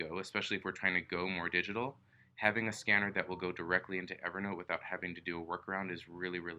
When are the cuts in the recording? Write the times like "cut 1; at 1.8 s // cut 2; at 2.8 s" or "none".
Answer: none